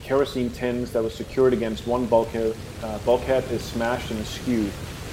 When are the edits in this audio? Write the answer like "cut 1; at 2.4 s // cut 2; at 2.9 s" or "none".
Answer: none